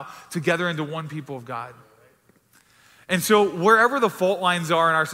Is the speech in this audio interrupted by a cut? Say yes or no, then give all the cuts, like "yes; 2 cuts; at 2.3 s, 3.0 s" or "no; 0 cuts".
no; 0 cuts